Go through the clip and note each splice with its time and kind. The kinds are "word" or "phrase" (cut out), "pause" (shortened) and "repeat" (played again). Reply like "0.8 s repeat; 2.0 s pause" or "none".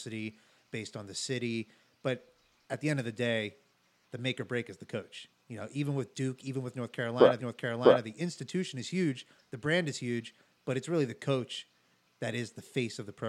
7.4 s repeat